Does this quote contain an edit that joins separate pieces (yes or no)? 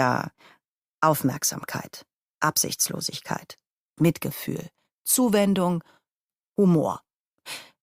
yes